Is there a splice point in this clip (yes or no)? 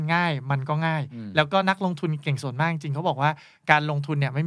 no